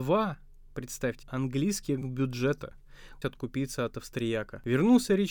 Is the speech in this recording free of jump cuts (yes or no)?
no